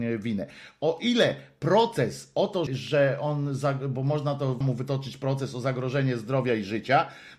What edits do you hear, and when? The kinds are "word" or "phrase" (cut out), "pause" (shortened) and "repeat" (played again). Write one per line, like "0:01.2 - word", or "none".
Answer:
0:02.7 - word
0:04.6 - word